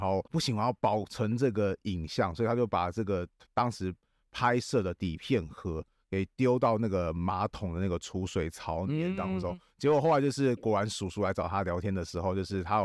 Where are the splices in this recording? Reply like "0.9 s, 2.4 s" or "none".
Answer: none